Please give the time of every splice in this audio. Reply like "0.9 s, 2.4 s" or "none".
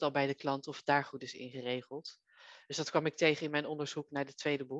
none